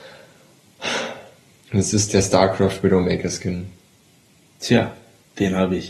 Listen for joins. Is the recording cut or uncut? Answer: uncut